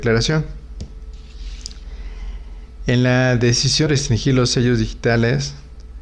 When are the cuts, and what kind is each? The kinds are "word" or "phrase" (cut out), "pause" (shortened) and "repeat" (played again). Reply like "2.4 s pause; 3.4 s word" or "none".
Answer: 3.9 s word